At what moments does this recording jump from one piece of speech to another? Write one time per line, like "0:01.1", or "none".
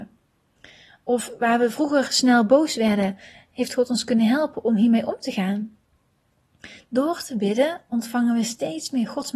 none